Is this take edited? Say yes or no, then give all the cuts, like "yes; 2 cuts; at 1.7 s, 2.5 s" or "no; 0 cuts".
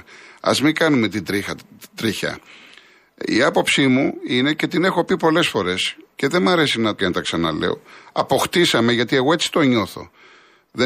yes; 2 cuts; at 6.1 s, 7.0 s